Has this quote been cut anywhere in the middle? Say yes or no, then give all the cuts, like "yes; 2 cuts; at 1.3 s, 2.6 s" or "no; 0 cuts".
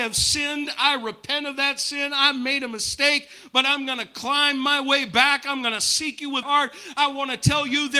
yes; 1 cut; at 6.4 s